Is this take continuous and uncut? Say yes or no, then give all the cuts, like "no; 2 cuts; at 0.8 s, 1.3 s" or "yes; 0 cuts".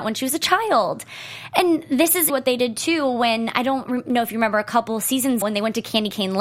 no; 2 cuts; at 2.3 s, 5.4 s